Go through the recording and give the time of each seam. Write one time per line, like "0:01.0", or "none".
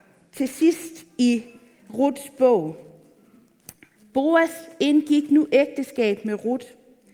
none